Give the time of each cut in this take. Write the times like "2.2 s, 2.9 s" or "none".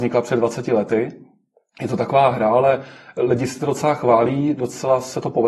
none